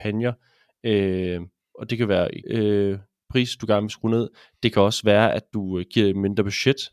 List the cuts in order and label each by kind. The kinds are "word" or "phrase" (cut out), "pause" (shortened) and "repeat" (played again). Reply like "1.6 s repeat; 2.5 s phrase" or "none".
2.4 s word